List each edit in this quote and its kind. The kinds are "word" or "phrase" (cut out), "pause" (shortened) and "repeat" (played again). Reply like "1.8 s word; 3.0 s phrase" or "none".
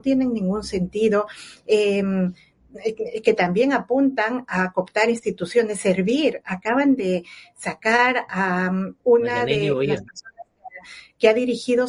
none

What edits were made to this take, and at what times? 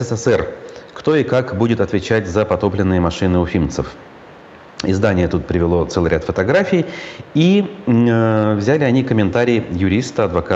none

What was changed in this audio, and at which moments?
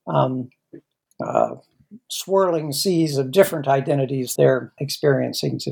4.4 s word; 4.8 s word

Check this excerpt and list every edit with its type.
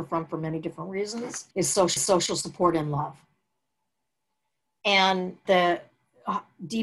1.5 s pause; 2.0 s repeat; 5.5 s phrase

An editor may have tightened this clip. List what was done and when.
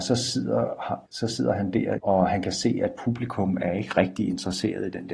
1.1 s pause; 2.0 s phrase

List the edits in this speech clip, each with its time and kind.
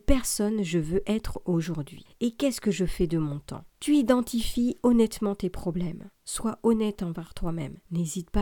3.7 s pause; 6.1 s pause

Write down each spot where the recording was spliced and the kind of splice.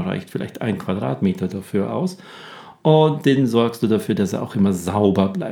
none

